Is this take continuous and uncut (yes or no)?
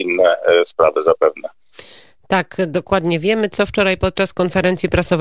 yes